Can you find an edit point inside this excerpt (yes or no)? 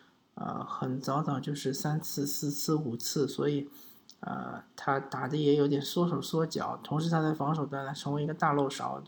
no